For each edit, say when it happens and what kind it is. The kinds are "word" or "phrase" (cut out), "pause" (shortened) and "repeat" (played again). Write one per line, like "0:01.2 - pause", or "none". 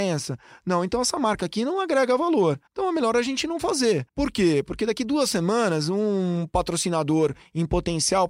0:02.7 - pause
0:04.1 - pause